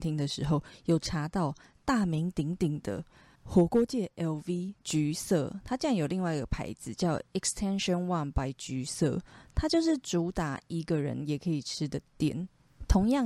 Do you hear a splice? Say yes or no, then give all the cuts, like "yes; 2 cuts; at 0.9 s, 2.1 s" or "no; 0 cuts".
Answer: no; 0 cuts